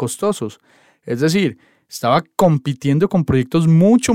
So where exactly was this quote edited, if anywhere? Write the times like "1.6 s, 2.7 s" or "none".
none